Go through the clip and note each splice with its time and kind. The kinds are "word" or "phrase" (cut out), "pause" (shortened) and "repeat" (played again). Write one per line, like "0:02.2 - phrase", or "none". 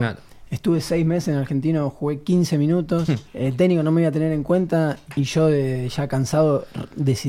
0:03.3 - pause
0:05.1 - word